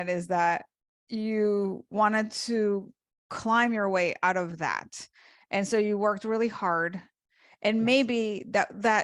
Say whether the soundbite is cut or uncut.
uncut